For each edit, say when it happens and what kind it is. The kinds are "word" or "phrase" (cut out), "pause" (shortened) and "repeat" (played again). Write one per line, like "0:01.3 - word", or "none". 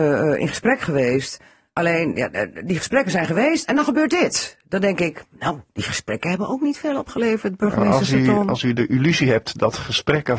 none